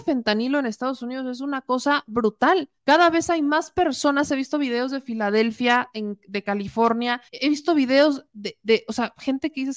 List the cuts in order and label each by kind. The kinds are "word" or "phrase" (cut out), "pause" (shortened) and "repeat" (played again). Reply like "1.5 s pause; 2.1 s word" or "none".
2.8 s pause; 7.3 s pause